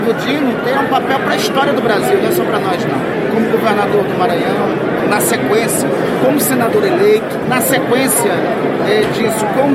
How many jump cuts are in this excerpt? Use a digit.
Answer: 0